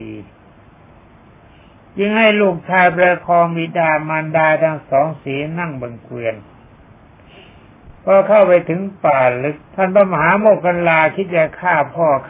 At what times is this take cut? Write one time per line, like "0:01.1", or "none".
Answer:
0:08.0
0:09.6